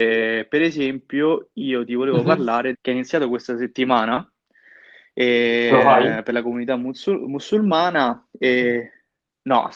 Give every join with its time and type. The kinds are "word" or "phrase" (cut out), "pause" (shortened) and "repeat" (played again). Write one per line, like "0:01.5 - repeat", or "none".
0:02.7 - phrase